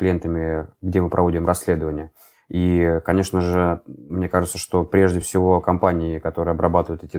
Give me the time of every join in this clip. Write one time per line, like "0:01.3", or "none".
none